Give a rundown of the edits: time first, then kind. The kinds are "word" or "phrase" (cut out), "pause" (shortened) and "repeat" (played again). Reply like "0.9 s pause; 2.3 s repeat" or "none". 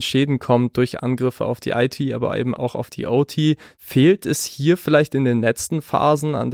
none